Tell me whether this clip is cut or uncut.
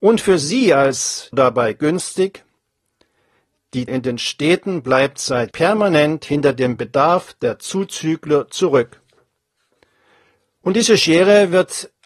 cut